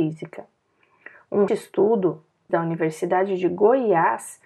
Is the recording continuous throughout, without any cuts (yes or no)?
no